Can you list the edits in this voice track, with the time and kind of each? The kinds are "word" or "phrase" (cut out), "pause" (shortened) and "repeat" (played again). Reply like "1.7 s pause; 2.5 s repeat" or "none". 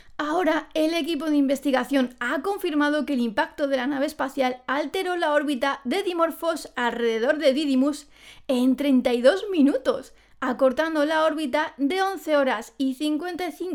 none